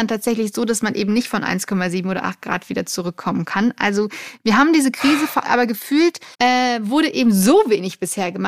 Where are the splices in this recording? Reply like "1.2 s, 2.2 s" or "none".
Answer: 5.4 s, 6.3 s